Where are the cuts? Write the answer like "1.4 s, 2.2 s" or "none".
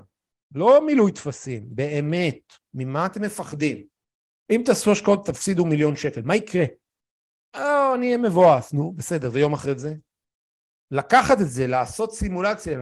none